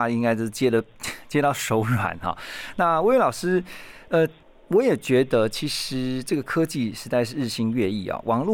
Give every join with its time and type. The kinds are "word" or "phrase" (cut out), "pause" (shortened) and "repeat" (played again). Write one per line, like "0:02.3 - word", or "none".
none